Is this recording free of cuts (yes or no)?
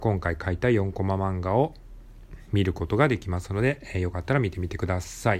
yes